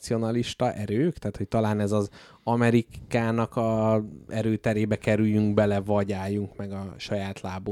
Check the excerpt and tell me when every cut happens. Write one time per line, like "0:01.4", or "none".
none